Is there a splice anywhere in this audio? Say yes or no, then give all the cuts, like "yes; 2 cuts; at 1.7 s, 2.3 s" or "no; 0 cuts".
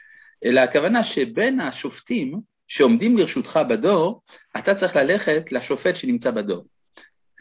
no; 0 cuts